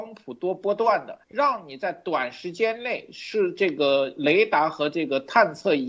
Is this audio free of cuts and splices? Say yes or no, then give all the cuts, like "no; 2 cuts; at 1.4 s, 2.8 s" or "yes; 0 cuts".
no; 1 cut; at 1.2 s